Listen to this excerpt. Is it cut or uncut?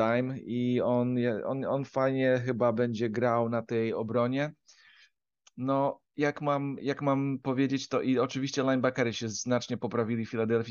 uncut